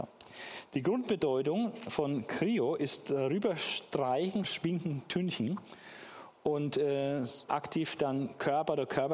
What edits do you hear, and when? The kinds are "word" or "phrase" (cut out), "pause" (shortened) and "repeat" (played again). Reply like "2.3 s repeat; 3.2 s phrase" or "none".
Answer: 4.4 s word; 7.5 s phrase